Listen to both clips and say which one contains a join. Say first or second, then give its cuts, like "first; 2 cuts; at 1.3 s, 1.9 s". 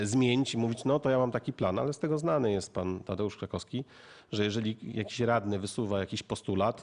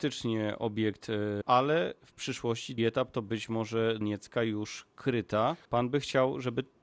second; 4 cuts; at 1.4 s, 2.8 s, 4.0 s, 5.6 s